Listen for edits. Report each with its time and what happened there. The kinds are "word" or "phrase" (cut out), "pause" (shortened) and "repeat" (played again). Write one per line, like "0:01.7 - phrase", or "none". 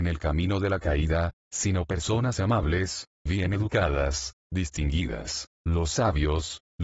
none